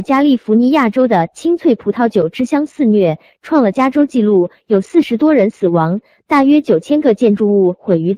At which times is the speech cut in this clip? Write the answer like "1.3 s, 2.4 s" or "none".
none